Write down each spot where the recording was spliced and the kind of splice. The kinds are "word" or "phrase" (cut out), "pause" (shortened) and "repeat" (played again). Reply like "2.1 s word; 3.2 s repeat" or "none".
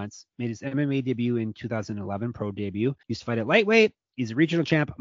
3.0 s pause